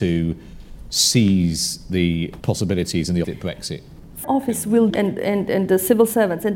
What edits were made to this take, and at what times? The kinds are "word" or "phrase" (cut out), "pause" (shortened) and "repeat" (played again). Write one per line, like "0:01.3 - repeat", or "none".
0:02.4 - word
0:03.2 - word
0:04.2 - word
0:04.9 - word